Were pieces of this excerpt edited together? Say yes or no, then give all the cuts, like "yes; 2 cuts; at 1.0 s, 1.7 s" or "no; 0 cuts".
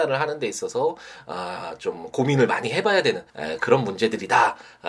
yes; 1 cut; at 3.3 s